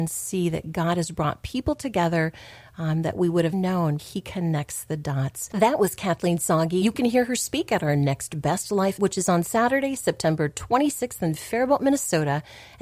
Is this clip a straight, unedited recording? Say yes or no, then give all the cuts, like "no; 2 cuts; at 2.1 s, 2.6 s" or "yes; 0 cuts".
no; 4 cuts; at 3.5 s, 4.0 s, 6.8 s, 9.0 s